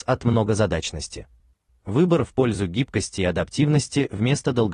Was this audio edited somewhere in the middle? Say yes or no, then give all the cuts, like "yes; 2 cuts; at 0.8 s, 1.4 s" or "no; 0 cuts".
no; 0 cuts